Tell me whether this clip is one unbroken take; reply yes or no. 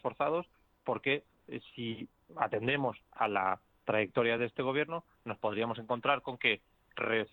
yes